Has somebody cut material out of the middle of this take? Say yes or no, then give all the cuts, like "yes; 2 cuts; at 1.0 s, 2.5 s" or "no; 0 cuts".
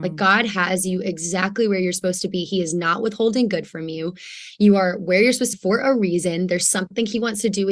yes; 1 cut; at 5.5 s